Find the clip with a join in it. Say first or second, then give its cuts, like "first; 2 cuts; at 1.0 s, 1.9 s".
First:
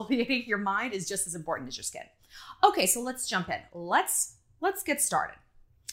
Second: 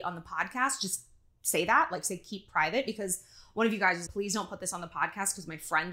second; 1 cut; at 4.1 s